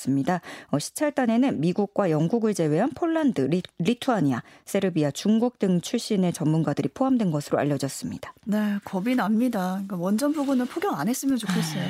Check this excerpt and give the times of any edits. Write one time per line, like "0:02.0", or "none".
none